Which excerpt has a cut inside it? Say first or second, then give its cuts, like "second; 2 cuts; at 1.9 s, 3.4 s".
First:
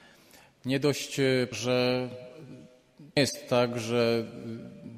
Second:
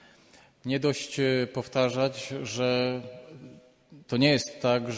first; 2 cuts; at 1.5 s, 3.2 s